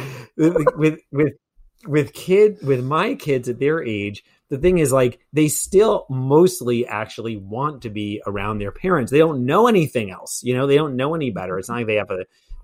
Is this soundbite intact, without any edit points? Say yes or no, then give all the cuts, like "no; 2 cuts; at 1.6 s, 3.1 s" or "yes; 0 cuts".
yes; 0 cuts